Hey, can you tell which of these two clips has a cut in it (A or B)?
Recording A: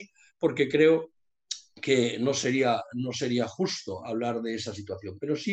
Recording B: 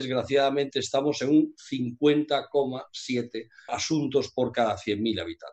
B